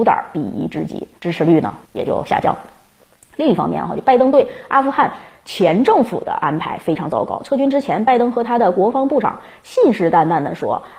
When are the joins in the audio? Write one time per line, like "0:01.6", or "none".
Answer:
0:01.2
0:01.8